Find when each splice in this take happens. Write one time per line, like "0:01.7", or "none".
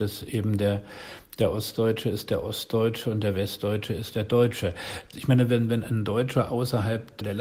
none